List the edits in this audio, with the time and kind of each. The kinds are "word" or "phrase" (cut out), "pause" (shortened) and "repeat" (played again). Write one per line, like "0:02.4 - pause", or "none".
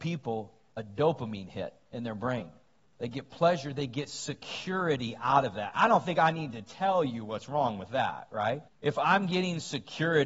0:02.8 - pause
0:08.7 - pause